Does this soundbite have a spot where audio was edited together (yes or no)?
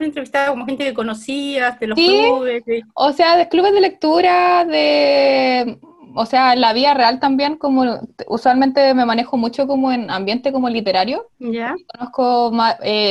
yes